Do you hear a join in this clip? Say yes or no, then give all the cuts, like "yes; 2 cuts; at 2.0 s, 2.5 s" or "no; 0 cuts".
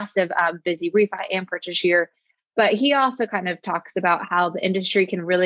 no; 0 cuts